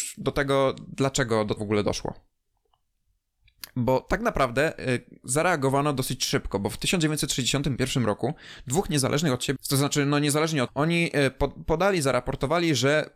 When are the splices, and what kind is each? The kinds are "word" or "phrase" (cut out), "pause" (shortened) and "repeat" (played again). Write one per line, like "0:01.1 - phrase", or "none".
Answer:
0:01.6 - word
0:09.6 - word
0:10.7 - word